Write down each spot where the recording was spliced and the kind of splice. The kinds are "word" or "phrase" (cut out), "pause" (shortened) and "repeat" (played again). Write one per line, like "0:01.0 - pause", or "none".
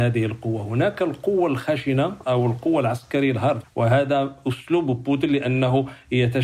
0:03.6 - word